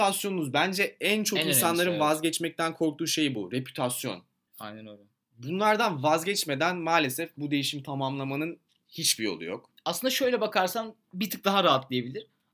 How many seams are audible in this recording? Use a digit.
0